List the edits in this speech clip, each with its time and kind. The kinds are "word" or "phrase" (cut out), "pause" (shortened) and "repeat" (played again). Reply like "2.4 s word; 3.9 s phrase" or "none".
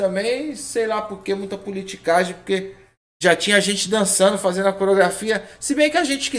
none